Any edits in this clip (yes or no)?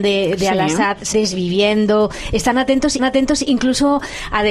yes